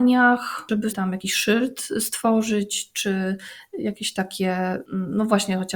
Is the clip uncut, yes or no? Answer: no